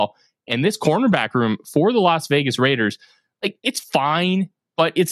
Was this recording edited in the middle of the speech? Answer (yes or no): no